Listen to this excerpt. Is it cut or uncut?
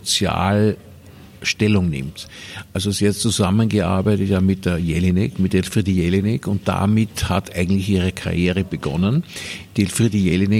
uncut